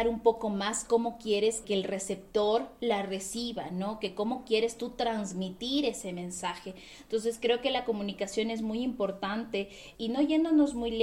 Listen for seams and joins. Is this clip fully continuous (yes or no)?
no